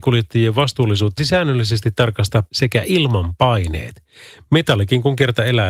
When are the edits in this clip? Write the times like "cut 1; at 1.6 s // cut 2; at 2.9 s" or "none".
cut 1; at 1.2 s // cut 2; at 2.5 s